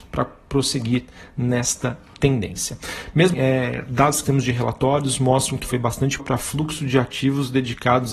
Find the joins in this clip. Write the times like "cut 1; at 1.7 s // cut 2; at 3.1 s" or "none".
cut 1; at 3.3 s // cut 2; at 4.2 s // cut 3; at 5.6 s // cut 4; at 6.2 s